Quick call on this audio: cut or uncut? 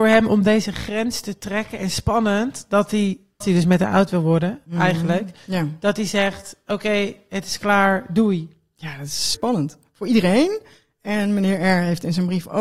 cut